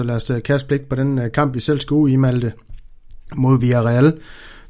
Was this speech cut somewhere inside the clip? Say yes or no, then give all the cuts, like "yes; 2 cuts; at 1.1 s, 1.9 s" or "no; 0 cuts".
no; 0 cuts